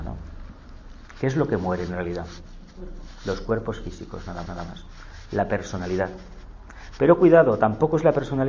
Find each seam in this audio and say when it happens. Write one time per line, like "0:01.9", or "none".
0:04.5